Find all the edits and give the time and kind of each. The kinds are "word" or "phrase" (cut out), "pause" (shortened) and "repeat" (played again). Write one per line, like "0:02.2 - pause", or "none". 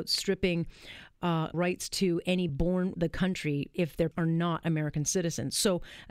0:01.5 - word
0:02.5 - word
0:02.9 - word
0:04.1 - word